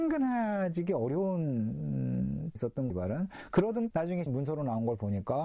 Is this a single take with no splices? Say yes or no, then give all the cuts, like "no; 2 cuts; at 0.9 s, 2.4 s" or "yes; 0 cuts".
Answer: no; 4 cuts; at 2.6 s, 2.9 s, 3.9 s, 4.3 s